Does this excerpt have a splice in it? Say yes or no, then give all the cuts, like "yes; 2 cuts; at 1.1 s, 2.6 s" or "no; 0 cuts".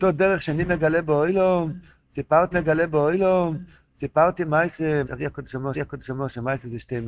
yes; 3 cuts; at 2.5 s, 5.0 s, 5.7 s